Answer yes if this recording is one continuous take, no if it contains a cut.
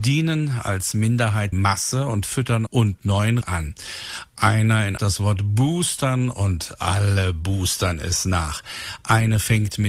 no